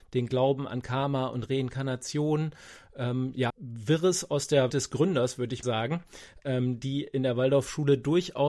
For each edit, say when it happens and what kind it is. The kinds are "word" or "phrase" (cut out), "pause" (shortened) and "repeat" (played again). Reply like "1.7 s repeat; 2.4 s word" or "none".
3.5 s phrase; 4.7 s word; 5.6 s word